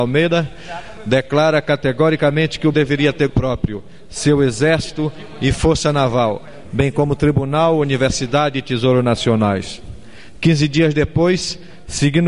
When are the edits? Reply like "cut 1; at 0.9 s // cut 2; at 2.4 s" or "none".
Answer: cut 1; at 2.7 s // cut 2; at 3.3 s